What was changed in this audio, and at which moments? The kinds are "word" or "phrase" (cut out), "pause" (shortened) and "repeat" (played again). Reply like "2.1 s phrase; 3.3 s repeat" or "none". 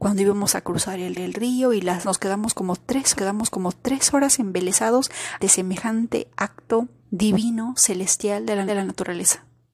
1.1 s repeat; 2.0 s word; 3.1 s repeat; 5.4 s word; 7.0 s pause; 8.7 s repeat